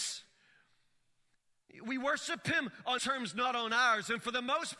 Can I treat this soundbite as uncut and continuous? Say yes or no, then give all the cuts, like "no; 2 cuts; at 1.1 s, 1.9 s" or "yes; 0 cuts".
no; 1 cut; at 3.0 s